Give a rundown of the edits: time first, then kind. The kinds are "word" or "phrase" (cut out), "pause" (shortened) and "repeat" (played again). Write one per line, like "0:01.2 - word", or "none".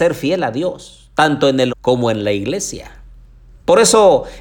0:01.7 - word